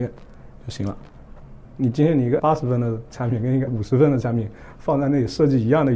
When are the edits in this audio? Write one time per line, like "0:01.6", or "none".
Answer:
0:02.4
0:03.7